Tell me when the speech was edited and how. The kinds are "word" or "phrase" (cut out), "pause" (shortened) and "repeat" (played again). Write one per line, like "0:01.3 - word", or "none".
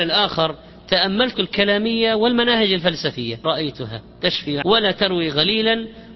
0:01.3 - word
0:03.4 - word
0:04.6 - word

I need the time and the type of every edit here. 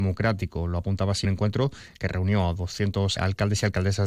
0:01.2 - phrase
0:03.2 - word

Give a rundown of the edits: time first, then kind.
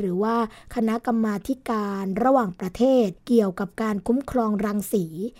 0:03.2 - pause

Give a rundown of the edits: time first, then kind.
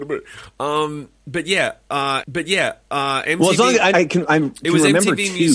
0:02.2 - repeat
0:03.9 - word

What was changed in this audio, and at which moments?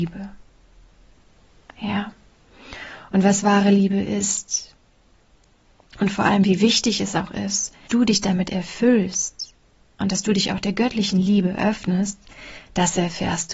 0:07.9 - word

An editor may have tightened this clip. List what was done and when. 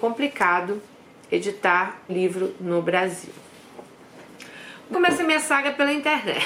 0:02.1 - word
0:04.9 - word

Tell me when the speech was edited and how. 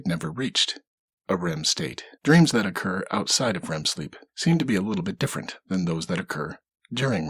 0:02.1 - pause
0:04.3 - pause

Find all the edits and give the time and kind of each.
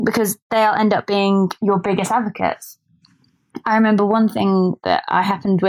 0:01.6 - word

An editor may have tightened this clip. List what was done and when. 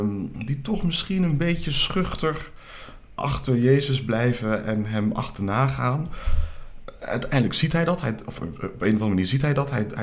0:03.2 - word

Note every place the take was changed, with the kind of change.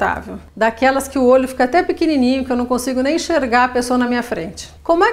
none

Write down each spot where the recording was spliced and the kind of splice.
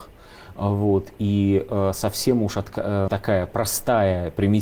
0:03.1 - word

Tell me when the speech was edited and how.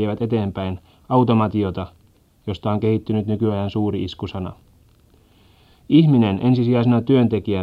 none

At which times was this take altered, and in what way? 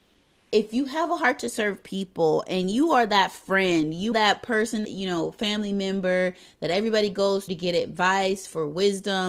0:04.1 - word
0:04.8 - word
0:07.5 - word

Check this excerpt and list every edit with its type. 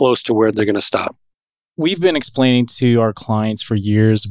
none

